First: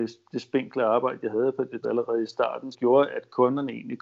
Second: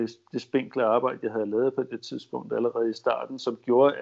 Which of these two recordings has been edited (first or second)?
first